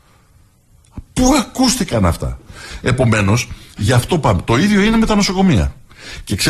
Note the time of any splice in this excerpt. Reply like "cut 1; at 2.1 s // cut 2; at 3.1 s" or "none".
none